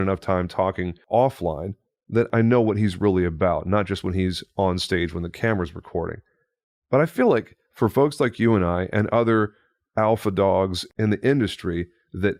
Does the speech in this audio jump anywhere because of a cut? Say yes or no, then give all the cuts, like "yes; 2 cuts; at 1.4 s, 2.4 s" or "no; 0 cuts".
no; 0 cuts